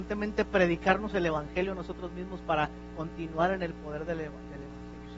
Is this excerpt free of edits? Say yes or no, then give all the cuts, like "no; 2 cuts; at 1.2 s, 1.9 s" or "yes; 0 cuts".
yes; 0 cuts